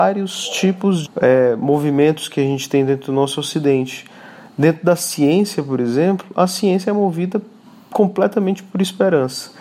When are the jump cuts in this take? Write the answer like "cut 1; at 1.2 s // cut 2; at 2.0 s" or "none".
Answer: cut 1; at 1.0 s